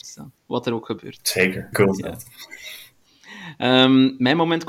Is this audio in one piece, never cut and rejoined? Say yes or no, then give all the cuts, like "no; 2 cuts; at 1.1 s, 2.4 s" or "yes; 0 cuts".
no; 1 cut; at 1.7 s